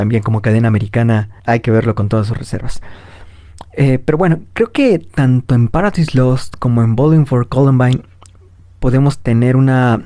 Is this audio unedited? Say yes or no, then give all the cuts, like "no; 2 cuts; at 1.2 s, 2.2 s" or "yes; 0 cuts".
no; 1 cut; at 1.4 s